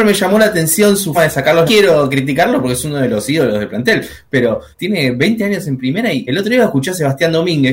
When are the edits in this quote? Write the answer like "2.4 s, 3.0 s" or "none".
1.1 s, 1.7 s, 4.7 s, 6.3 s